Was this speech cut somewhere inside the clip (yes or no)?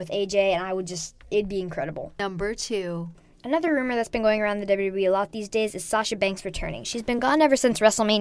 no